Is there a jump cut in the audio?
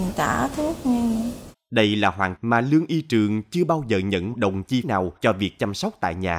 yes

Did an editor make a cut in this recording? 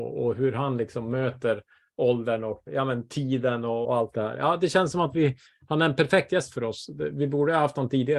yes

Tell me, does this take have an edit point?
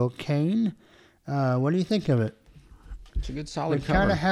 yes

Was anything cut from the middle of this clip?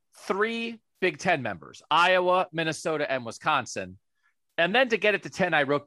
no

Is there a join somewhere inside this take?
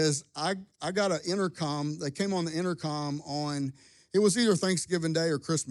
no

